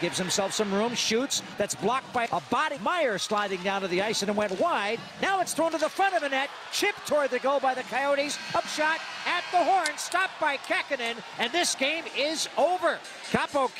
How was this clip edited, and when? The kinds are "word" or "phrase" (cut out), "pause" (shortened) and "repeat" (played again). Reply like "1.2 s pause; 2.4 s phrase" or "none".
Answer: 2.3 s word; 2.8 s word; 8.6 s word